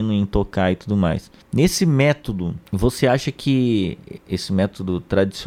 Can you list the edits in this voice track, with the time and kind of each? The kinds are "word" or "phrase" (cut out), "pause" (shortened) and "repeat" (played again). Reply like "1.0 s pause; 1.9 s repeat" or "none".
1.4 s pause; 2.7 s pause